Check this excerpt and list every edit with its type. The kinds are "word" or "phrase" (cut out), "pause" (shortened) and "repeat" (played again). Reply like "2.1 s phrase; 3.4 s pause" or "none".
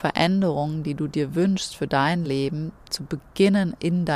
none